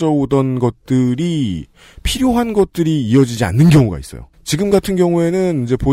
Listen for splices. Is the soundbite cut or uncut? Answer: uncut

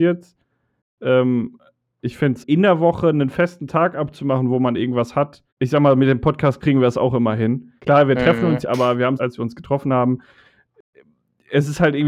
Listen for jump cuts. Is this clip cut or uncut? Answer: cut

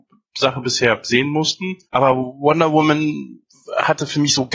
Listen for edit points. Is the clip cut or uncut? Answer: cut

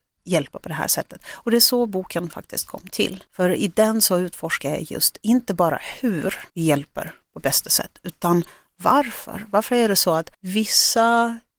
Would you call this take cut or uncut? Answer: cut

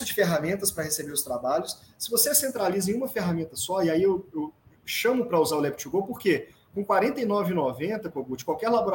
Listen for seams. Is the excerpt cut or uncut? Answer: uncut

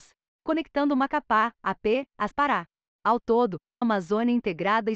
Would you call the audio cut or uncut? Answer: cut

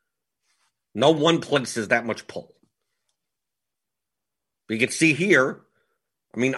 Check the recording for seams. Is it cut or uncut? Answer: uncut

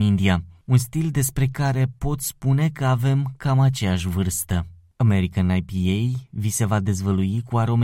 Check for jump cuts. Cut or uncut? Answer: uncut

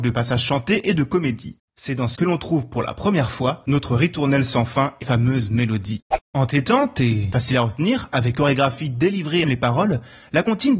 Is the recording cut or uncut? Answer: cut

